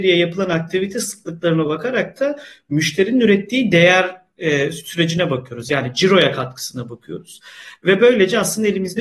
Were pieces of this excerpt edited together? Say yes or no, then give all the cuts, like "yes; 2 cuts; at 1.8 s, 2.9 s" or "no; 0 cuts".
no; 0 cuts